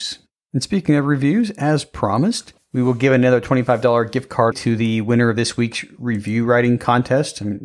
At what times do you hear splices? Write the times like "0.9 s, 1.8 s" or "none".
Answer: 4.5 s